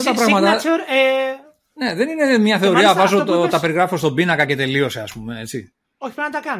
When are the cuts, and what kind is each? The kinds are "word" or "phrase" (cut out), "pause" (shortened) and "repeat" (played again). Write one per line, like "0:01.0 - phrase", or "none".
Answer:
none

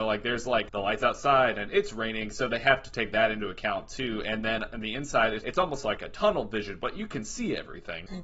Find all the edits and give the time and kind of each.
0:05.4 - word

